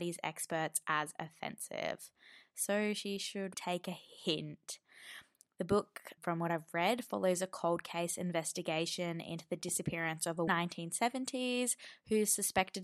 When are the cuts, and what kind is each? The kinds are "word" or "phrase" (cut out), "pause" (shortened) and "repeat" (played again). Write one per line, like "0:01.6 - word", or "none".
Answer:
0:03.5 - word
0:06.2 - word
0:10.5 - phrase